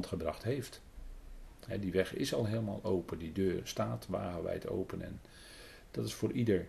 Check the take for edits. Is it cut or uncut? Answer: uncut